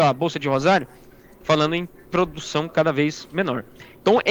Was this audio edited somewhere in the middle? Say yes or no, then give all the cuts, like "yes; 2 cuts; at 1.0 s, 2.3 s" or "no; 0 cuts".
no; 0 cuts